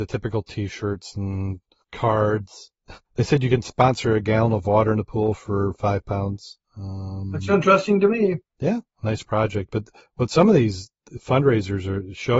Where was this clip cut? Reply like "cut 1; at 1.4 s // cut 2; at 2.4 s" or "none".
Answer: none